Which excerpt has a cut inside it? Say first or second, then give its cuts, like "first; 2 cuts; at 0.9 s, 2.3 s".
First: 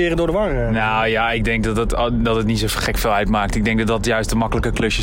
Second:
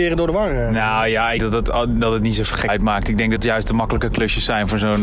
second; 3 cuts; at 1.4 s, 2.7 s, 3.4 s